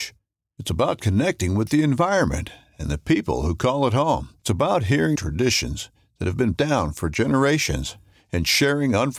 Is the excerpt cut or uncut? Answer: cut